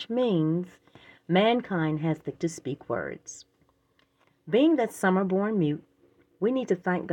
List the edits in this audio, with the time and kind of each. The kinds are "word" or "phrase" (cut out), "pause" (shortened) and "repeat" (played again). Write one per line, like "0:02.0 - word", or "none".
0:02.3 - word